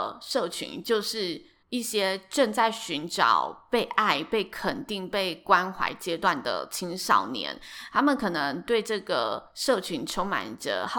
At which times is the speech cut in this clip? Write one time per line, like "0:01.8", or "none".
0:01.6